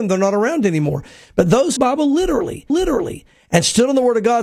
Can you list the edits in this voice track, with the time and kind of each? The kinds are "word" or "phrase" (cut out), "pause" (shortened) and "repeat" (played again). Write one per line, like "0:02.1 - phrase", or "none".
0:01.8 - phrase
0:02.7 - repeat